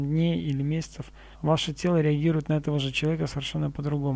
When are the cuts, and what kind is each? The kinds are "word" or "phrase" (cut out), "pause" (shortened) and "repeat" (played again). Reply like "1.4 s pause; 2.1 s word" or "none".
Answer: 1.3 s pause